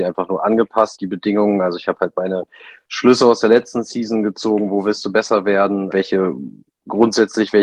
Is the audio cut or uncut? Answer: cut